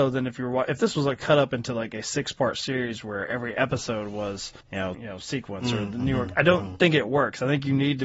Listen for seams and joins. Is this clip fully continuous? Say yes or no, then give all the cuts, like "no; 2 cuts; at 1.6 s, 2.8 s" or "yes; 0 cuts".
no; 2 cuts; at 4.6 s, 4.9 s